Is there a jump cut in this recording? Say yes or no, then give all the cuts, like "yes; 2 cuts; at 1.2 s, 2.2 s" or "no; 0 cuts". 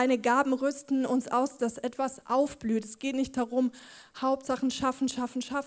no; 0 cuts